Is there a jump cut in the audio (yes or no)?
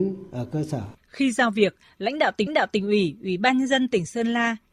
yes